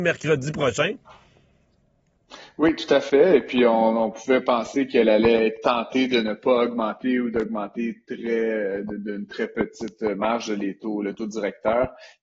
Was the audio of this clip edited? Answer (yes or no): no